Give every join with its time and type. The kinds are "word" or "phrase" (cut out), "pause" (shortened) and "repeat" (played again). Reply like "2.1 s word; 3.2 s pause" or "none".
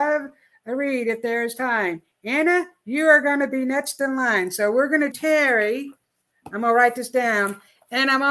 5.1 s word